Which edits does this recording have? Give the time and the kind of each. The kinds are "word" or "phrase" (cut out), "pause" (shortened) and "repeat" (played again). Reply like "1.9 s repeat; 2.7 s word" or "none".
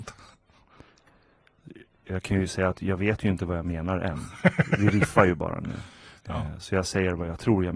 6.2 s pause